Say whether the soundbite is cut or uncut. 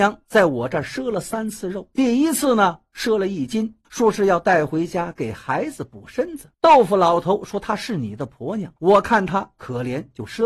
cut